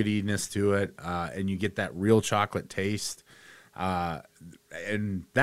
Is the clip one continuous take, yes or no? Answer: yes